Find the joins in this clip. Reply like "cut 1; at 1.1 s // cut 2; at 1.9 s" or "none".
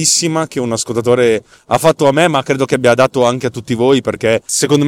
none